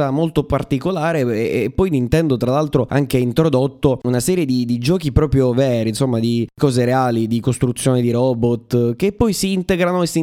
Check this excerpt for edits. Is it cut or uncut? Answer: uncut